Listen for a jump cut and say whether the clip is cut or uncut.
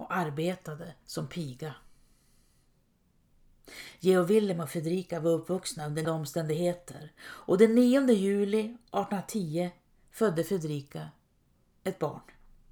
cut